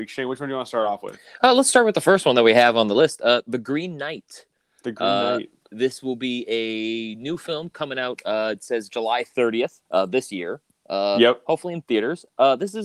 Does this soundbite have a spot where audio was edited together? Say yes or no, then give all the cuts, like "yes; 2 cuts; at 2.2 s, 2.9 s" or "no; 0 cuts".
yes; 1 cut; at 9.9 s